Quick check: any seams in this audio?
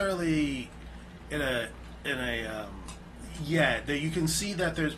no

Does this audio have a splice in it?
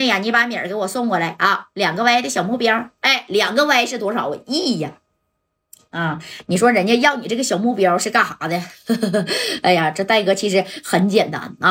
no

